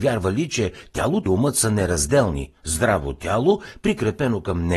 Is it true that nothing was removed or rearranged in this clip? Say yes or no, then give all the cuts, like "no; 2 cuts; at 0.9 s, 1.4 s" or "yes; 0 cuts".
no; 2 cuts; at 1.3 s, 2.6 s